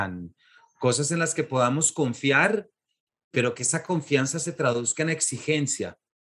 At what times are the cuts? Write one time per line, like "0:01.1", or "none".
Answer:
none